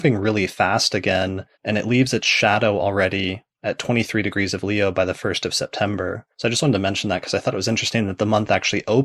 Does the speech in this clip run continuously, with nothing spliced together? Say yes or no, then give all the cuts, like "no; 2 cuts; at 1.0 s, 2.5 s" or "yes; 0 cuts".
no; 2 cuts; at 1.5 s, 6.3 s